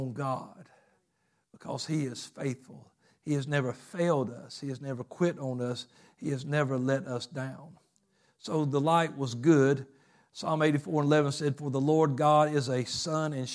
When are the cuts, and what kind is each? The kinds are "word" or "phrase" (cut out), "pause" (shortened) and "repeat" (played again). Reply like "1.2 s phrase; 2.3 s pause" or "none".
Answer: none